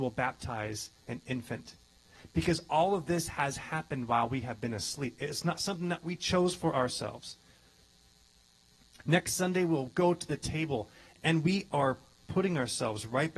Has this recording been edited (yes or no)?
no